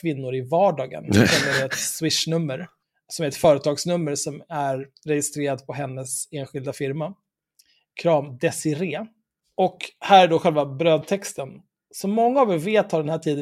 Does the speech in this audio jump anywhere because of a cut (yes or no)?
no